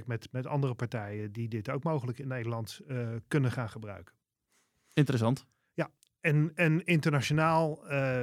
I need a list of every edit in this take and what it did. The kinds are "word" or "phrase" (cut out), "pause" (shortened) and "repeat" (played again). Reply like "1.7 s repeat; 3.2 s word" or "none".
none